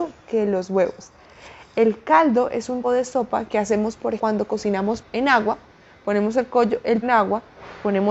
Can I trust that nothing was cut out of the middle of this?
no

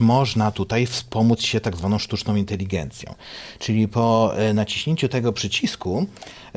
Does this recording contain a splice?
no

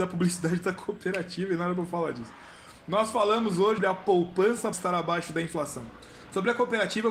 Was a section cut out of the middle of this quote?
yes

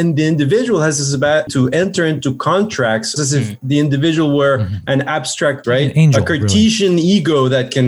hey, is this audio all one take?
no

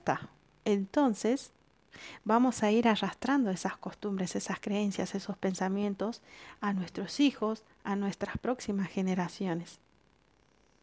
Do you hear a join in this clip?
no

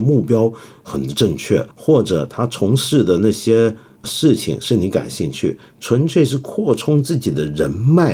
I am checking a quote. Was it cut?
yes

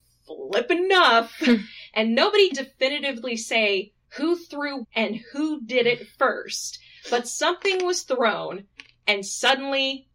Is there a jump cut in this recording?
yes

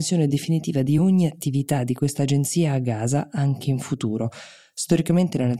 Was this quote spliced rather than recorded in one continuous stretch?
no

